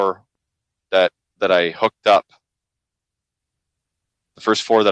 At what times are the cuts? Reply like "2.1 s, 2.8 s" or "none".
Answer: none